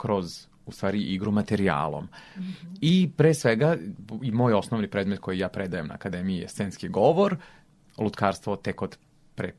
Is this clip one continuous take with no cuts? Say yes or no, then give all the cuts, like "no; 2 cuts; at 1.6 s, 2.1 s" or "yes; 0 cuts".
yes; 0 cuts